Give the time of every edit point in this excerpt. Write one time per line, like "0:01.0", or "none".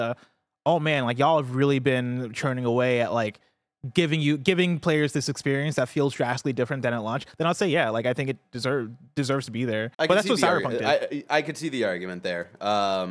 0:09.9

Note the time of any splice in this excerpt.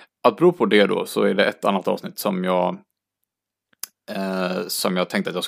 none

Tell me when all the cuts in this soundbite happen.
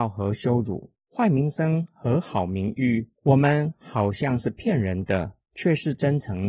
0:00.9
0:03.2
0:05.4

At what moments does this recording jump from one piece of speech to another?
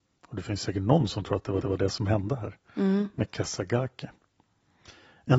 0:01.6

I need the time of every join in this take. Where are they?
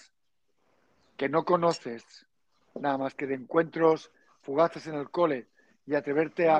none

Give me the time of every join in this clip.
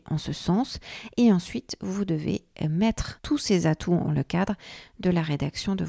0:04.1

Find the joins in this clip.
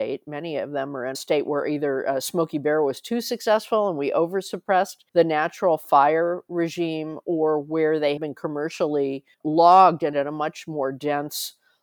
0:01.1
0:05.1
0:08.2
0:09.3
0:10.1

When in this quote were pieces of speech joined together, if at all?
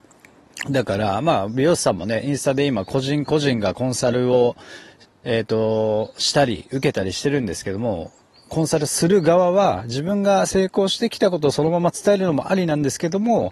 none

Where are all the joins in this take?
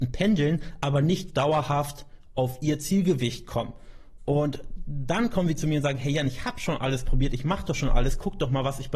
0:01.3

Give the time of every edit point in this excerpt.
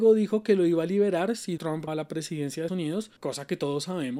0:01.6
0:01.9
0:02.7
0:03.2

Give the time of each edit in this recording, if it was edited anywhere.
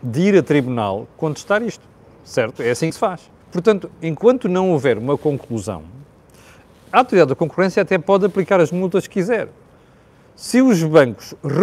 0:03.4

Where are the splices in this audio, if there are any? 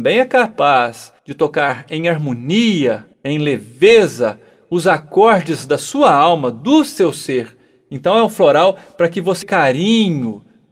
0:01.2
0:03.1
0:09.4

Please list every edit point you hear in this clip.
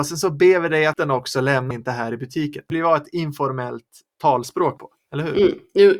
0:01.0
0:01.7
0:02.7
0:04.8

